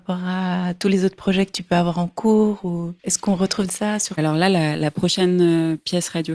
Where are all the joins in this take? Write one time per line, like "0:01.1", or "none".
0:03.0
0:03.7
0:04.2